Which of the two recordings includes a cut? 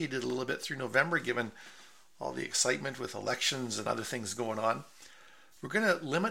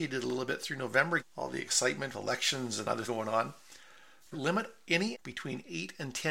second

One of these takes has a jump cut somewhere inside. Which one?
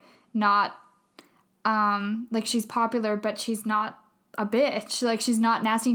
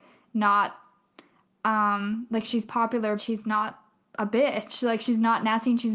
second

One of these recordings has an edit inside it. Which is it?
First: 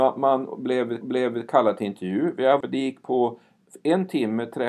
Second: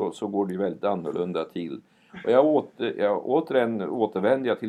first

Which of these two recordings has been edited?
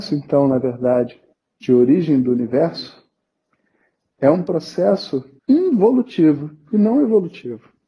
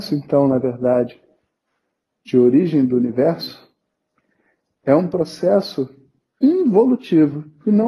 first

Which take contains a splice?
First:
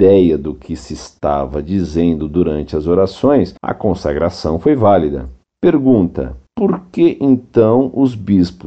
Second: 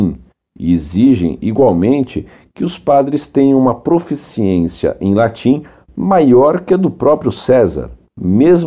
first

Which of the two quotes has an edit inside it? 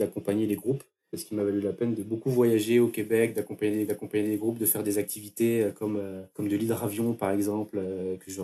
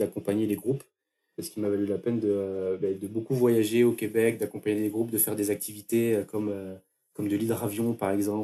first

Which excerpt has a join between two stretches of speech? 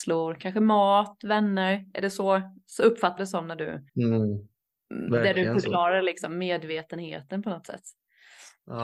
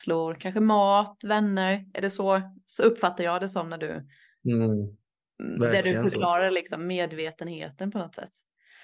first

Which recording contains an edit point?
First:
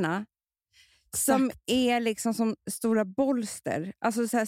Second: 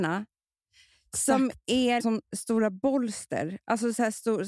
second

